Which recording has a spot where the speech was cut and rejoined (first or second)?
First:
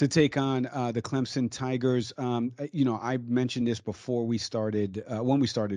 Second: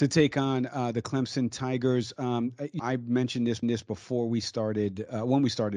second